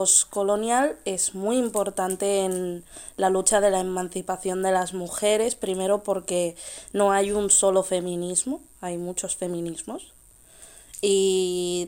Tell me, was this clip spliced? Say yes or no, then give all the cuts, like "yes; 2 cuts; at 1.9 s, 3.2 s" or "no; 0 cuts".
no; 0 cuts